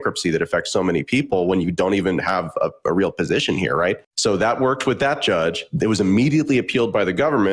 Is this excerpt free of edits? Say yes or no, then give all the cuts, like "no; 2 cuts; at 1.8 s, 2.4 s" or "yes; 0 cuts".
yes; 0 cuts